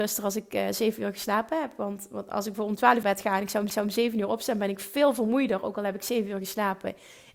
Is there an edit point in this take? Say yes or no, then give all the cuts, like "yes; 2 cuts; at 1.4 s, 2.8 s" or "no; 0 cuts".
yes; 2 cuts; at 3.0 s, 3.7 s